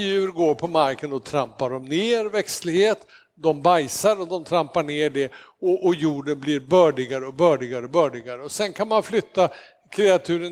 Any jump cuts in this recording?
no; 0 cuts

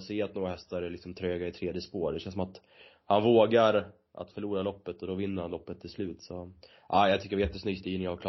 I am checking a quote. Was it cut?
no; 0 cuts

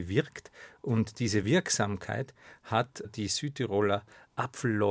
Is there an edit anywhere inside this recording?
no; 0 cuts

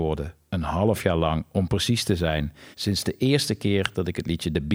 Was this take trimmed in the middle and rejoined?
yes; 1 cut; at 2.7 s

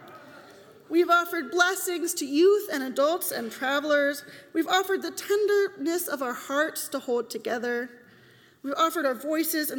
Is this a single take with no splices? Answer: yes; 0 cuts

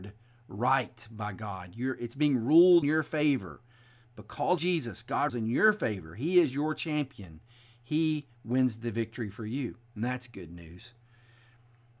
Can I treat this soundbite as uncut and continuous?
no; 3 cuts; at 2.8 s, 4.6 s, 5.3 s

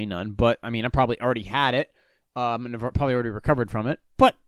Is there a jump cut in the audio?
no; 0 cuts

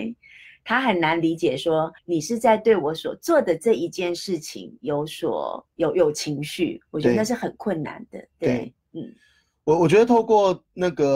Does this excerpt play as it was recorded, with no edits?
no; 1 cut; at 2.0 s

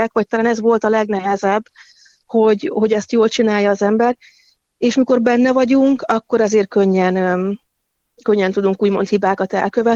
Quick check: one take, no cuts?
yes; 0 cuts

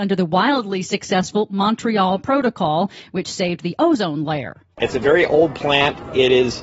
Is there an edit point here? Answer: no; 0 cuts

